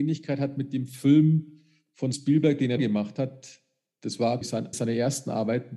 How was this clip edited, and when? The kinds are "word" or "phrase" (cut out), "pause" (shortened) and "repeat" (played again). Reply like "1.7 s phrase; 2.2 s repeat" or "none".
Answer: 2.1 s word; 2.8 s word; 4.4 s word; 4.7 s word